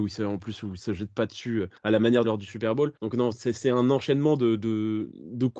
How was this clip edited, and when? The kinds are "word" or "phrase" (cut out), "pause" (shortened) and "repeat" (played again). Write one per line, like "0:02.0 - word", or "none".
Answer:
0:01.8 - pause
0:02.2 - phrase
0:03.0 - pause